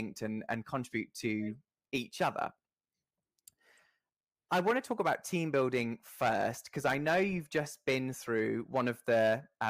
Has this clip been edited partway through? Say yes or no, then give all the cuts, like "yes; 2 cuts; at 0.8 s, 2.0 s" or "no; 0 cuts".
no; 0 cuts